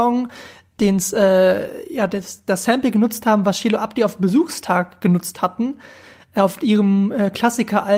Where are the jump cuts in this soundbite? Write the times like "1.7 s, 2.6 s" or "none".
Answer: none